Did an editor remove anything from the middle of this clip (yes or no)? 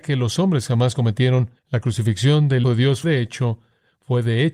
yes